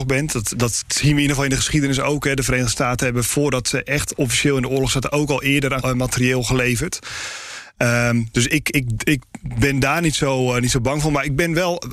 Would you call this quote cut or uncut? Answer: cut